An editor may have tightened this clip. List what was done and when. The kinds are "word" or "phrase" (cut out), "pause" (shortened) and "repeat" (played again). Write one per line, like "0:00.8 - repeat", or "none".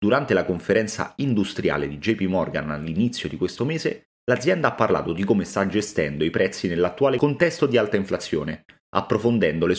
none

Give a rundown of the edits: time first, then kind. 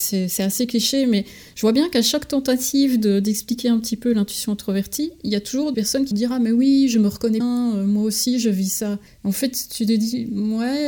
0:05.7 - word
0:06.1 - word
0:07.4 - word
0:09.1 - pause

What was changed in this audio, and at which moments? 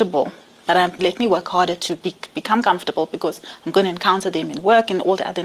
0:01.0 - phrase

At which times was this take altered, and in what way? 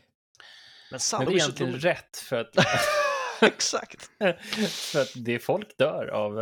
0:01.3 - phrase

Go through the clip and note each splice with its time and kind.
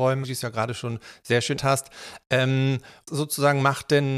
0:01.6 - word
0:03.1 - word

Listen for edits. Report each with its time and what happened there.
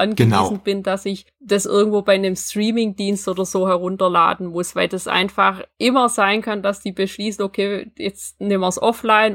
none

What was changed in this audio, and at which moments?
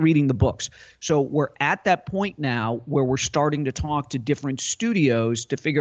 none

